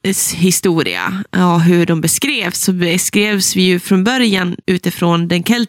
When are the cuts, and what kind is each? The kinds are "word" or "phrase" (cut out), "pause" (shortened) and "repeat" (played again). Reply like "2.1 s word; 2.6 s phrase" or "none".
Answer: 4.6 s word